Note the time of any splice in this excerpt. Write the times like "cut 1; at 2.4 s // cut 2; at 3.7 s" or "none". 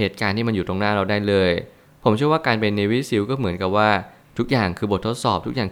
none